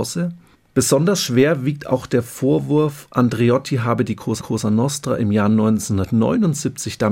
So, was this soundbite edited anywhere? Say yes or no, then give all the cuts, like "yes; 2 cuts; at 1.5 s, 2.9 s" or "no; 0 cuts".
yes; 1 cut; at 4.4 s